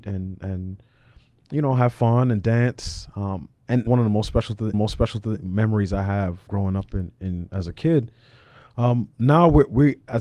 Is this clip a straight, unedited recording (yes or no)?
no